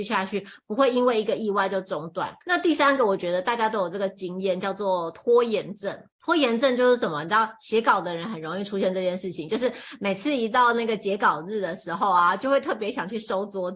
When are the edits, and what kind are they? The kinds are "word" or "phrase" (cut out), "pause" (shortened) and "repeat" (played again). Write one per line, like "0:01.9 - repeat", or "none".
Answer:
0:02.4 - pause
0:06.1 - pause